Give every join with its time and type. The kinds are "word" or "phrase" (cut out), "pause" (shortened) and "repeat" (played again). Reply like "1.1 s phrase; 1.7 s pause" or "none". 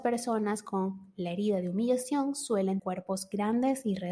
2.8 s word